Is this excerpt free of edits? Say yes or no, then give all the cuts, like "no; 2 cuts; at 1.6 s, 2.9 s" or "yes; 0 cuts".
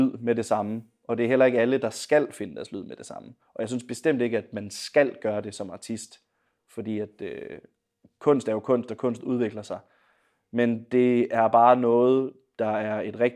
yes; 0 cuts